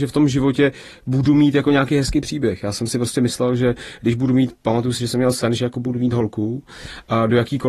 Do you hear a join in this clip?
no; 0 cuts

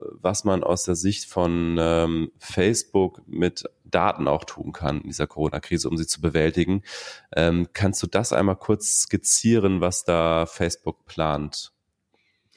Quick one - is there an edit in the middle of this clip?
yes; 1 cut; at 2.3 s

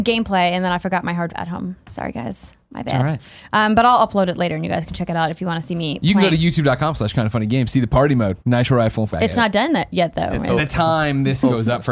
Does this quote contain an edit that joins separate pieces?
yes; 4 cuts; at 1.3 s, 8.4 s, 9.1 s, 10.6 s

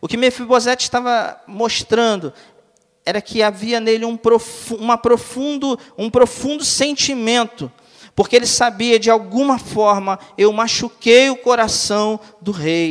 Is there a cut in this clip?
no; 0 cuts

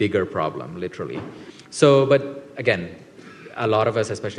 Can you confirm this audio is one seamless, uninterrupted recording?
yes; 0 cuts

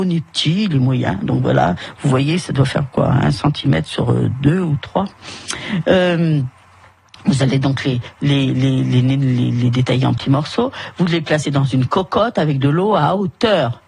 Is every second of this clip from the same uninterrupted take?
yes; 0 cuts

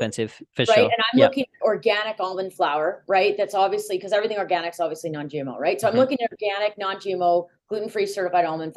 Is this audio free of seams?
no; 1 cut; at 1.6 s

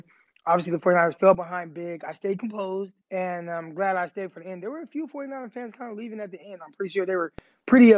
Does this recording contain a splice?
yes; 1 cut; at 3.0 s

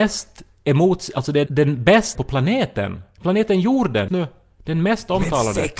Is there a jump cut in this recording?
yes; 3 cuts; at 1.5 s, 2.1 s, 4.1 s

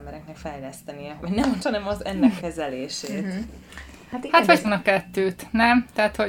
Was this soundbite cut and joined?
yes; 4 cuts; at 1.2 s, 1.6 s, 2.4 s, 4.6 s

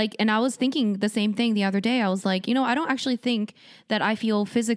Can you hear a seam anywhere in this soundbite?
no; 0 cuts

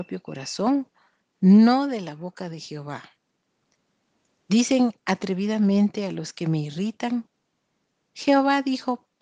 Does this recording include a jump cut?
no; 0 cuts

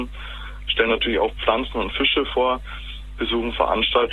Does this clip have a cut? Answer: no; 0 cuts

